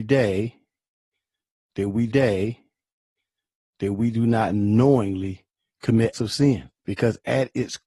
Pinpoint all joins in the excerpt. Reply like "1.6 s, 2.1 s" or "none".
2.1 s, 6.1 s, 6.8 s